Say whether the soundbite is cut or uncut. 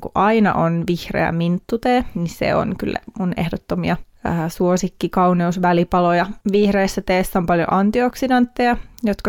cut